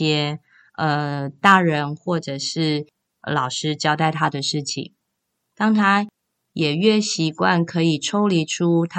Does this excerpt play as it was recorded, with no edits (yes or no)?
yes